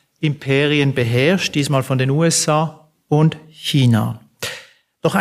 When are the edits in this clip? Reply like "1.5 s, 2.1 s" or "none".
none